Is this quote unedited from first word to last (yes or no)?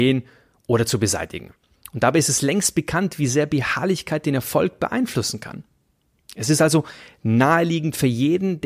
yes